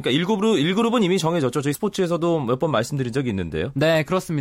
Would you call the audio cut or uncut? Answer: cut